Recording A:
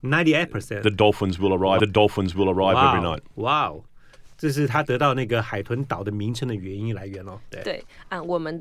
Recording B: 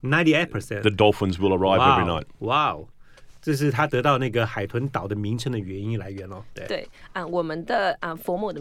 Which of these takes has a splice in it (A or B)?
A